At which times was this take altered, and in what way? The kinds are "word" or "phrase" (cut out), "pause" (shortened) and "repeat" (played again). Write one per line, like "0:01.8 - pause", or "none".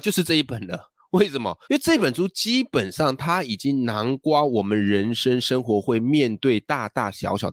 0:01.6 - pause